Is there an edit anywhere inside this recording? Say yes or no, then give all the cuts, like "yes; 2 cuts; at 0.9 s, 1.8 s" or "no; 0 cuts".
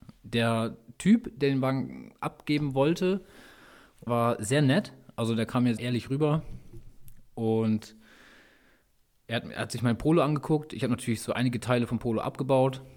yes; 2 cuts; at 4.1 s, 5.8 s